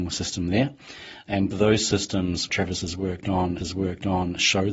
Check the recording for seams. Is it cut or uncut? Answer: cut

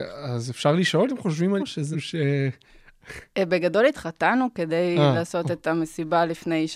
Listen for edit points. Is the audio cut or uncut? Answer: cut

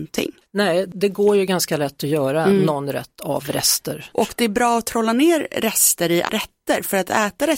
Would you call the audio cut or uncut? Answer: cut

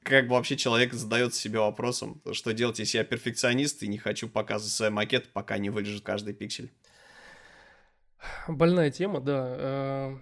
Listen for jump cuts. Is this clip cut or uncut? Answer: cut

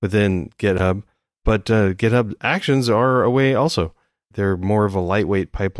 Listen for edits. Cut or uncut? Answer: uncut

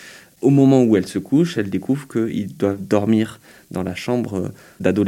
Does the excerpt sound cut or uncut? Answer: uncut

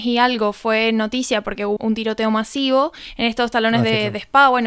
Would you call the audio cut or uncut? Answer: cut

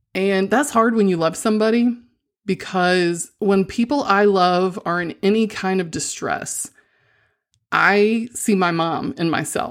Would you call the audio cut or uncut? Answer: uncut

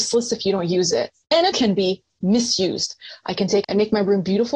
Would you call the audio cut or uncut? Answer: cut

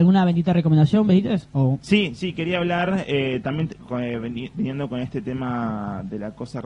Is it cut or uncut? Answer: cut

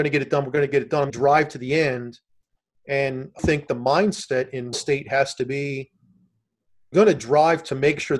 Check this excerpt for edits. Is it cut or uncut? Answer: cut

